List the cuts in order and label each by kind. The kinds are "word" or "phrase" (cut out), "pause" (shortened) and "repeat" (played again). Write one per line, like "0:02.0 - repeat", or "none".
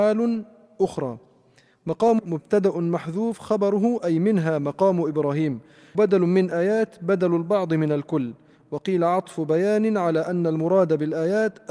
0:02.2 - word
0:05.9 - word